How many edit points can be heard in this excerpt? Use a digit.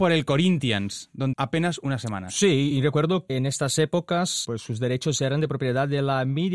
4